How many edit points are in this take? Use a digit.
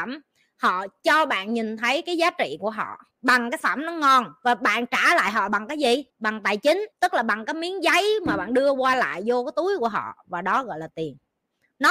4